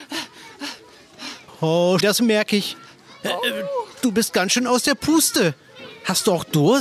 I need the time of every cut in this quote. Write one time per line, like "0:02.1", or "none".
0:02.0